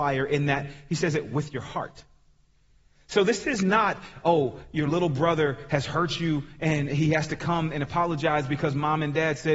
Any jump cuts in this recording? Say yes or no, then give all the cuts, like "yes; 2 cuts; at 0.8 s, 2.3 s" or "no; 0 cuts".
no; 0 cuts